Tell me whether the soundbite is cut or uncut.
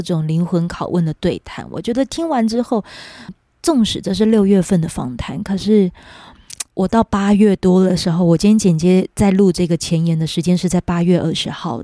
cut